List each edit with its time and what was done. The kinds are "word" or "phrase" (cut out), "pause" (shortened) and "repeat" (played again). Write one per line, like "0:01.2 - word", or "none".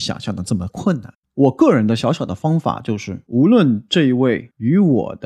0:01.2 - pause